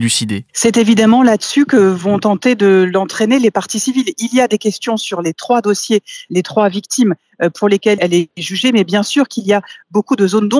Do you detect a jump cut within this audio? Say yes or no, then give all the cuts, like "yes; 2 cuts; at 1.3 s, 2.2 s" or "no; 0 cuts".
no; 0 cuts